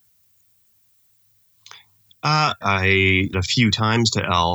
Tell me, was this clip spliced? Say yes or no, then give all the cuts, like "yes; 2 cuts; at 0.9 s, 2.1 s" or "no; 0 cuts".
yes; 2 cuts; at 2.6 s, 3.3 s